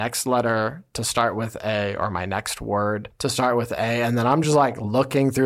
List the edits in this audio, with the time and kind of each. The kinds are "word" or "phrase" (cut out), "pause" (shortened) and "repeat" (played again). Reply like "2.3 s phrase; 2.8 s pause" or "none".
none